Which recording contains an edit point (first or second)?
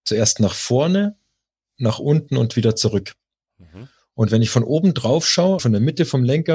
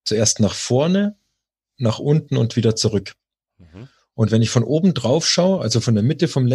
first